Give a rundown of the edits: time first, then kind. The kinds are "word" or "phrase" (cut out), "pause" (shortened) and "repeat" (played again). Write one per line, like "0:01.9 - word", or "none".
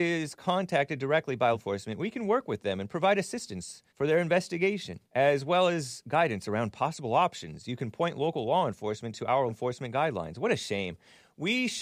0:01.5 - word
0:03.9 - pause
0:05.0 - pause
0:09.5 - word